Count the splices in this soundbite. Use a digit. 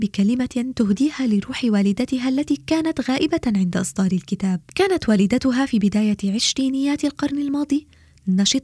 1